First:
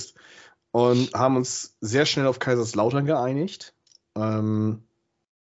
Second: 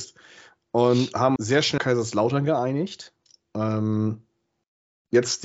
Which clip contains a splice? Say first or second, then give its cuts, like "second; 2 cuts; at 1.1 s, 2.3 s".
second; 2 cuts; at 1.4 s, 1.8 s